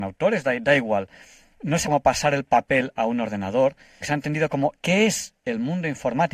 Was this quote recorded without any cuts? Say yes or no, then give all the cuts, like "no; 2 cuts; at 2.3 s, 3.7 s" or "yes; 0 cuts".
no; 3 cuts; at 1.8 s, 4.0 s, 4.7 s